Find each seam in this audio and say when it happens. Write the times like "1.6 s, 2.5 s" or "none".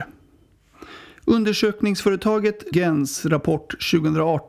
2.7 s